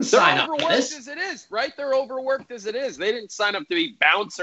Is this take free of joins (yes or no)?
yes